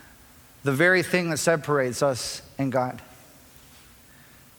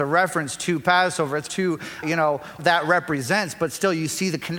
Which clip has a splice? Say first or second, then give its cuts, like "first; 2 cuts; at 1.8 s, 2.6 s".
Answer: second; 3 cuts; at 1.5 s, 2.0 s, 2.6 s